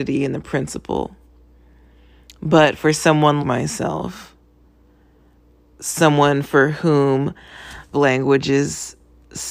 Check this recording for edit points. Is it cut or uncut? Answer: cut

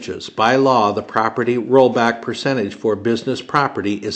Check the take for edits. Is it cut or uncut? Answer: uncut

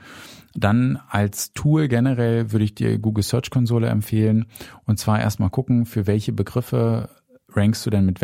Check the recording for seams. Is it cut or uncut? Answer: uncut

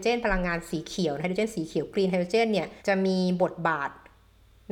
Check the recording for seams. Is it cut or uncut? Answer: cut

